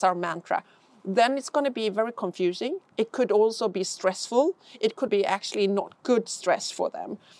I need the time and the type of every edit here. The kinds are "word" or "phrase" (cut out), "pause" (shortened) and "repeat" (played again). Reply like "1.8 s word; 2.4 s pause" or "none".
5.1 s word